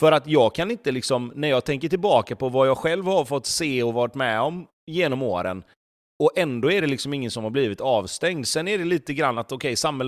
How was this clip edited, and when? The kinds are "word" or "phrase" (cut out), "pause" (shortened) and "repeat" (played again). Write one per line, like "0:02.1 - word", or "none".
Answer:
none